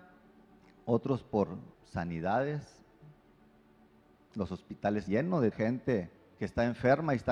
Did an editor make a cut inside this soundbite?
yes; 4 cuts; at 1.7 s, 5.1 s, 5.5 s, 6.2 s

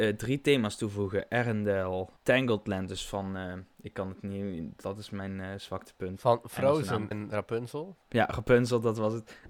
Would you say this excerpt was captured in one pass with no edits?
no; 3 cuts; at 2.2 s, 7.1 s, 8.0 s

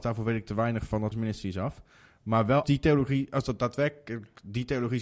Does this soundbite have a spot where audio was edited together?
yes; 2 cuts; at 1.1 s, 2.6 s

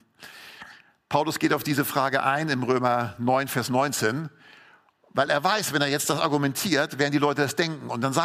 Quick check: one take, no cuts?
yes; 0 cuts

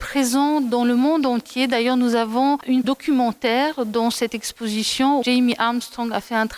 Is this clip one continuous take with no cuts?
no; 2 cuts; at 2.8 s, 5.2 s

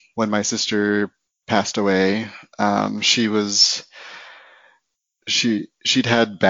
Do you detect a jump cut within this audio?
no; 0 cuts

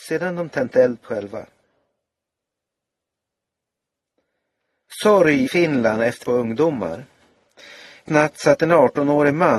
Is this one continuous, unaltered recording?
no; 4 cuts; at 1.0 s, 5.5 s, 6.2 s, 8.1 s

